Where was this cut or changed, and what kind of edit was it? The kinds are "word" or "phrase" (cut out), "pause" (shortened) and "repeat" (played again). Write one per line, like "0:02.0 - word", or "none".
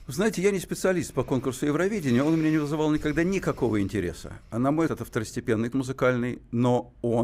0:04.9 - word
0:05.7 - word